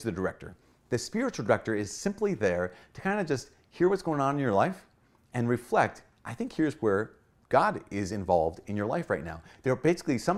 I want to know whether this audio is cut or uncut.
uncut